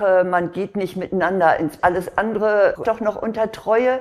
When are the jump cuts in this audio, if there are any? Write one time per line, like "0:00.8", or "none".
0:01.8
0:02.8